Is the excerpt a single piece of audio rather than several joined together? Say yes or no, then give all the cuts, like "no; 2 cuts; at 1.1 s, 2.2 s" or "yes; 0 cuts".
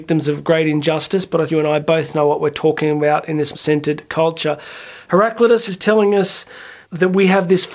no; 4 cuts; at 1.5 s, 3.5 s, 5.7 s, 6.8 s